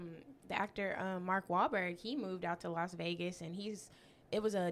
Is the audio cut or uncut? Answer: uncut